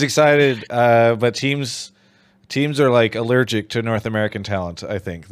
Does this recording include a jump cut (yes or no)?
no